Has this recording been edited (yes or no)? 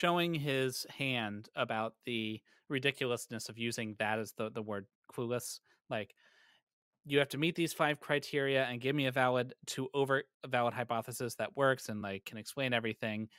no